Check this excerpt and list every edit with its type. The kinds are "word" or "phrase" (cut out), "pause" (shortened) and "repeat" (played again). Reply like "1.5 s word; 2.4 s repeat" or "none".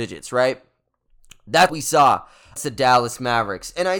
1.7 s word; 2.6 s word